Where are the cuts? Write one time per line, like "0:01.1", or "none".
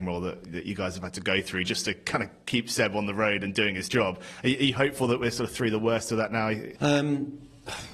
none